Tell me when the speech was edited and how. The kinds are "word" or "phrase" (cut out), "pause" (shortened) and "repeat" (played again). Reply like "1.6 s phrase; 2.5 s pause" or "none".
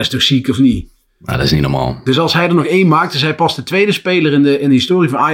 none